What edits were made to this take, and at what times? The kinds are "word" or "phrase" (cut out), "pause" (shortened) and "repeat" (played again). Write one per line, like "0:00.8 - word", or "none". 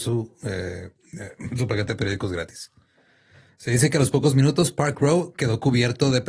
none